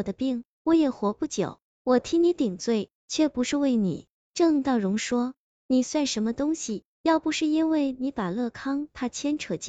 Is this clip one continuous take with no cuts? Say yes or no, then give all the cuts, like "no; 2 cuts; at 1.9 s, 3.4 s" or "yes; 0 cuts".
no; 1 cut; at 3.0 s